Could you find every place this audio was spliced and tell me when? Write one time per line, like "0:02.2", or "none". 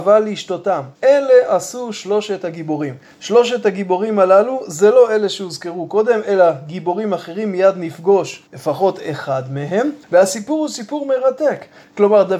0:00.9
0:08.5
0:10.0